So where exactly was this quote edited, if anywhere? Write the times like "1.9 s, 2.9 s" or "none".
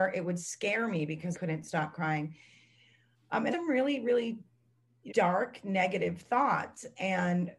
1.3 s, 3.5 s, 5.1 s